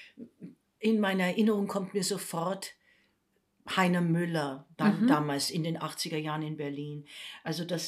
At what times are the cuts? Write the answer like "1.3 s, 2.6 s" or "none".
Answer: 4.7 s